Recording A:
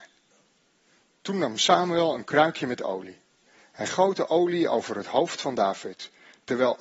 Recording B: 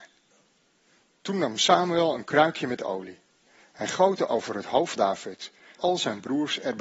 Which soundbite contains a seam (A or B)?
B